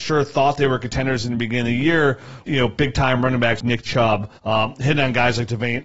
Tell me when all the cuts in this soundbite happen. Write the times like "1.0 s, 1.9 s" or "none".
2.5 s, 3.6 s, 4.4 s